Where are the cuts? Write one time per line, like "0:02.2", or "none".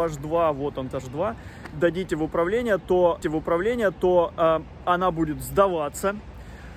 0:00.9
0:01.7
0:03.2